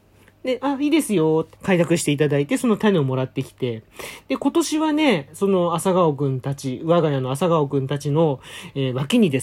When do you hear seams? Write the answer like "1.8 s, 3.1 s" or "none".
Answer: 1.5 s